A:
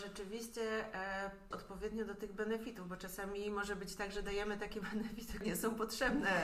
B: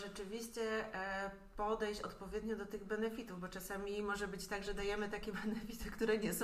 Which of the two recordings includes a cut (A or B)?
A